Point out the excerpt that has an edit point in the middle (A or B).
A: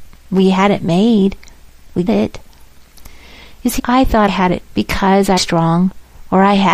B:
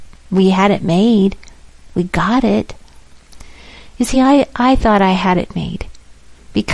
A